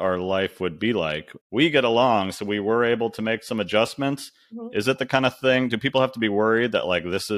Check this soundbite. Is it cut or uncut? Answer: cut